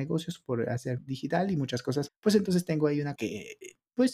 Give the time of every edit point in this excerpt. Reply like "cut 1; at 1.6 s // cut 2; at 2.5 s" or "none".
cut 1; at 1.0 s // cut 2; at 2.1 s // cut 3; at 3.1 s